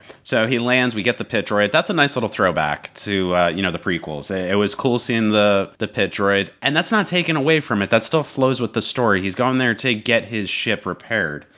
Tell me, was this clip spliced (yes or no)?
yes